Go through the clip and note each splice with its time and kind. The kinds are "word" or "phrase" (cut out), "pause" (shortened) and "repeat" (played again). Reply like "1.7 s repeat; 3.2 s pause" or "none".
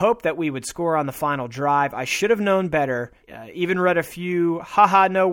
3.2 s pause